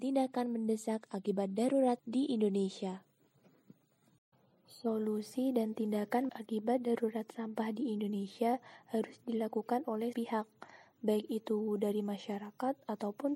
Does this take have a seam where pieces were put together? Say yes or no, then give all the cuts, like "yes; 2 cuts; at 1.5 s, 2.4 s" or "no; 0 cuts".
yes; 3 cuts; at 2.0 s, 6.3 s, 10.1 s